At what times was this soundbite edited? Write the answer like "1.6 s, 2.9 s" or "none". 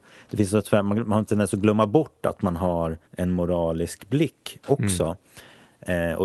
3.0 s